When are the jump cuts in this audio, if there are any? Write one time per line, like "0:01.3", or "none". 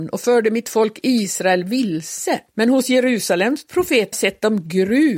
0:02.5
0:04.1